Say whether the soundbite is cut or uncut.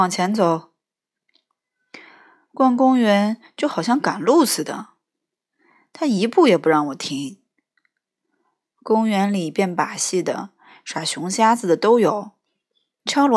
uncut